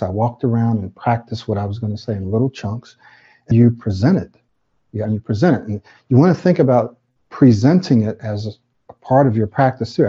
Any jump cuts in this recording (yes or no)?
yes